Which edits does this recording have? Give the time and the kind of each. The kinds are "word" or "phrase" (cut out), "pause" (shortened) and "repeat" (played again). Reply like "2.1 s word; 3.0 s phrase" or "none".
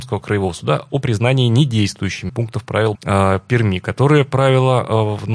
2.3 s word; 2.9 s word